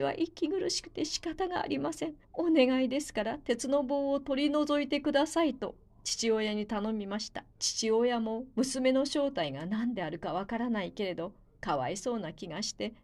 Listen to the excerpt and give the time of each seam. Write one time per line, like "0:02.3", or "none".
0:02.2
0:07.5